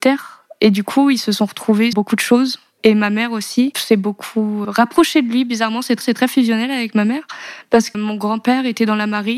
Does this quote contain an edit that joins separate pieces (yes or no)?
yes